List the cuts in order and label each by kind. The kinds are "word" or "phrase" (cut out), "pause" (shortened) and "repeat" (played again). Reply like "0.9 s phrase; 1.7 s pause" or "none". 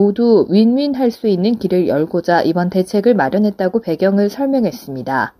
none